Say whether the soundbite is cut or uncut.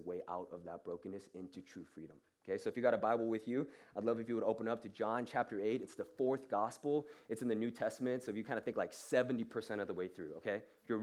uncut